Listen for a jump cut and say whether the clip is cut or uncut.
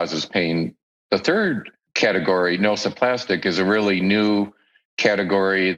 uncut